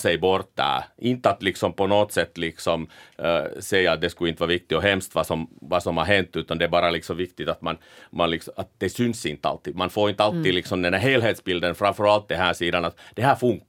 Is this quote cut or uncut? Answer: uncut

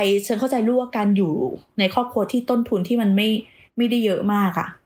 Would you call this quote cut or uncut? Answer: uncut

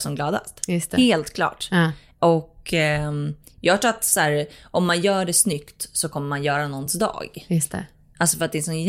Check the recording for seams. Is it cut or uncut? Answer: uncut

